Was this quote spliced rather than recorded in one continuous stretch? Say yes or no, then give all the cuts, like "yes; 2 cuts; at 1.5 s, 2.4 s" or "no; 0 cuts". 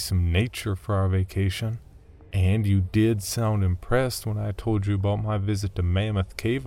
yes; 1 cut; at 2.3 s